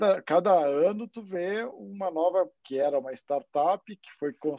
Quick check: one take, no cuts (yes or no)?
no